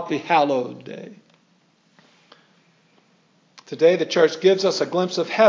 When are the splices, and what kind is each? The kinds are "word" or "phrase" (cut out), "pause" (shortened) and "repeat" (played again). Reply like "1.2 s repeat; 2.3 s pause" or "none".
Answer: none